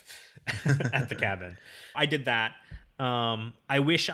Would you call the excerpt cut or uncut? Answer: cut